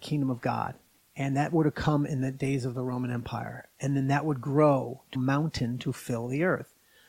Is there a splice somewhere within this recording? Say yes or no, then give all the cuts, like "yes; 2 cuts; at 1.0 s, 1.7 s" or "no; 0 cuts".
yes; 2 cuts; at 0.9 s, 5.2 s